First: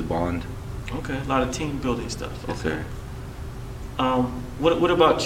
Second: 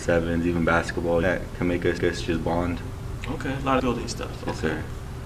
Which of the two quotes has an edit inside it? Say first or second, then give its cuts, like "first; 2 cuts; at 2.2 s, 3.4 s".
second; 3 cuts; at 1.2 s, 2.0 s, 3.8 s